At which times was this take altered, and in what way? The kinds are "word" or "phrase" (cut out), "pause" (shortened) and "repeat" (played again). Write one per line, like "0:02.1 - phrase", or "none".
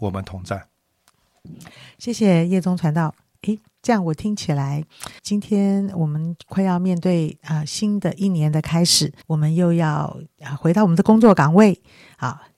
0:05.2 - word
0:09.2 - pause